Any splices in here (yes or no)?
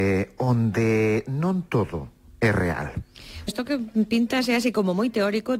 yes